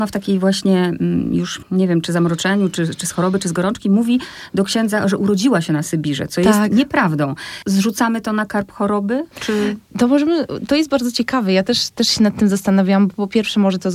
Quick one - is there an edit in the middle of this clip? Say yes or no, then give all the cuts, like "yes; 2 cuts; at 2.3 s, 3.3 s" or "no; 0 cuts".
yes; 1 cut; at 9.3 s